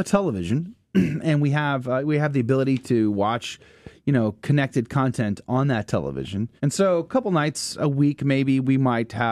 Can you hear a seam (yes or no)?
yes